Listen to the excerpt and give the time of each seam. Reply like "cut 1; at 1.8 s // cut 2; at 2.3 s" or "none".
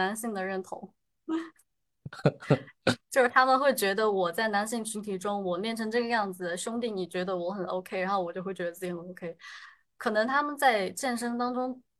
none